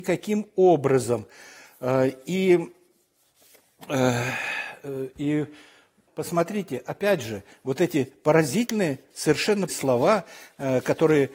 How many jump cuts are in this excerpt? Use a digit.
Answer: 2